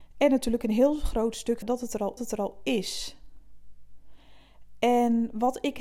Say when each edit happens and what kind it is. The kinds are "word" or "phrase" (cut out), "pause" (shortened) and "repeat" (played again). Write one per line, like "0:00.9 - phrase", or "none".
0:01.6 - word
0:02.2 - repeat